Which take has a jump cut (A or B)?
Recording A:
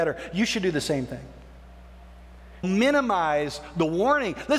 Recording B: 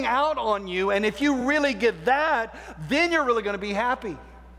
A